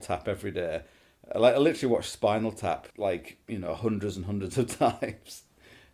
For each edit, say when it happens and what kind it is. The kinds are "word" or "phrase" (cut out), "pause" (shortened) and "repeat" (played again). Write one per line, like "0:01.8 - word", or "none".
0:02.9 - pause